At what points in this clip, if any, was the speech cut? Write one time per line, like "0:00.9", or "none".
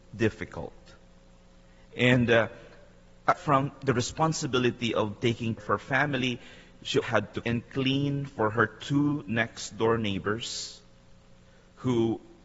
0:03.3
0:05.6
0:07.0
0:07.4